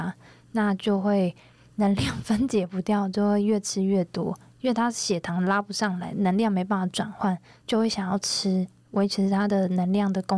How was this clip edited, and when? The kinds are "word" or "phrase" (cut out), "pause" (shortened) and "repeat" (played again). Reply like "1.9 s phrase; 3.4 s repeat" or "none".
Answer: none